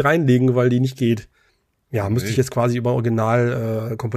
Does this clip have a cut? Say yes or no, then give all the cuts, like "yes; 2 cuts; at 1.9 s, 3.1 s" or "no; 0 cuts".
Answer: yes; 1 cut; at 1.5 s